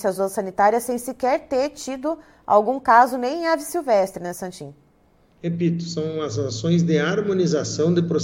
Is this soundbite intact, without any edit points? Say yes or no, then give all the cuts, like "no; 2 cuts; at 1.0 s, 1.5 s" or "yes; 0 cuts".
yes; 0 cuts